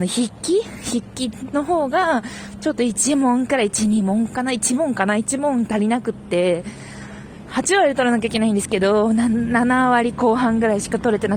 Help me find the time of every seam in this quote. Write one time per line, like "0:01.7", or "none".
none